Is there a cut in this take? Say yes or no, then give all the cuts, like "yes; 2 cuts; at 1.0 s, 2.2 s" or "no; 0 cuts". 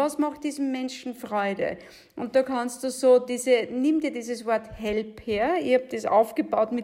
no; 0 cuts